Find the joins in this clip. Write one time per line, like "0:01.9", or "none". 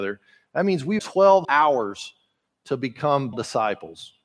0:01.0
0:01.4
0:03.3